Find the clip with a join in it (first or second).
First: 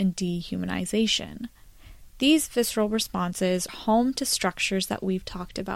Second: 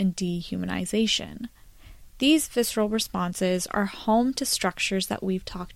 first